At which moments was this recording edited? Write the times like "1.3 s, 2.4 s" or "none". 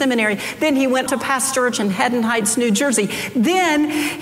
1.1 s, 1.7 s